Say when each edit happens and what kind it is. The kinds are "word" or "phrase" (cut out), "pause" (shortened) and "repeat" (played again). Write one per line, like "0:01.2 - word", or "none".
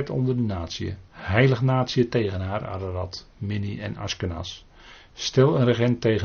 0:01.1 - pause

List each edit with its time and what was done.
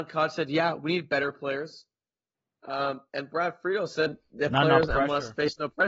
0:03.1 - pause

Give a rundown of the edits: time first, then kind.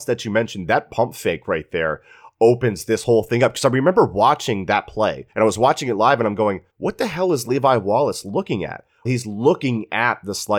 0:05.3 - pause
0:06.7 - pause
0:09.0 - word

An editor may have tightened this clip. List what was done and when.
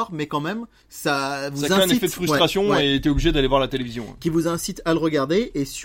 none

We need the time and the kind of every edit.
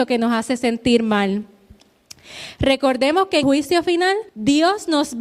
0:03.4 - word
0:04.3 - pause

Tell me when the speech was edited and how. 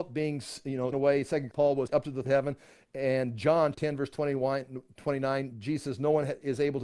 0:00.9 - word
0:01.5 - word
0:01.9 - word
0:02.2 - word
0:03.7 - word

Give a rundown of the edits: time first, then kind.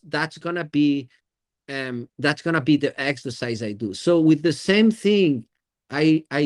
none

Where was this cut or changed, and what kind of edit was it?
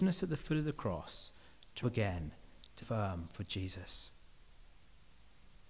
0:01.8 - word
0:02.8 - word

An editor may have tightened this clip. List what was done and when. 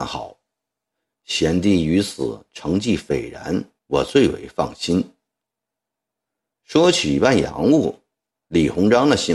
0:03.8 - pause

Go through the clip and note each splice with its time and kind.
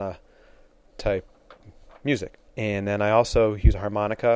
0:02.5 - pause

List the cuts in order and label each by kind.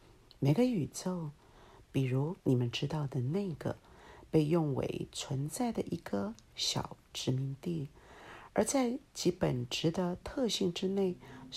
0:02.4 - pause

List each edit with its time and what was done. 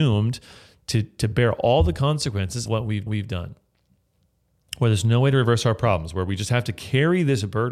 0:02.7 - word
0:03.1 - repeat

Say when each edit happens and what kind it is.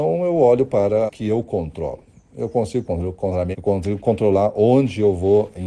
0:01.1 - phrase
0:02.9 - phrase
0:03.5 - word

